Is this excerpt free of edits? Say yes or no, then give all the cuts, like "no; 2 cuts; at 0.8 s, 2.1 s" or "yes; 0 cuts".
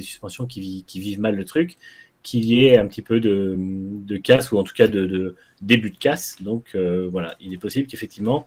yes; 0 cuts